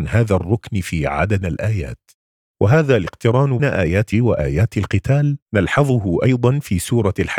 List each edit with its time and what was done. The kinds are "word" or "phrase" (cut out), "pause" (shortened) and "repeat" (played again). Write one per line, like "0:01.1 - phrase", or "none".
0:01.4 - word
0:03.6 - word
0:04.1 - word
0:05.4 - pause